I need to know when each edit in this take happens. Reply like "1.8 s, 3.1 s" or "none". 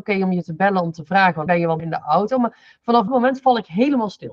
1.5 s, 1.8 s, 3.1 s